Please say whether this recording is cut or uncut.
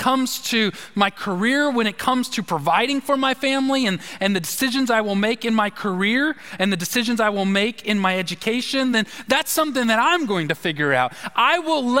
uncut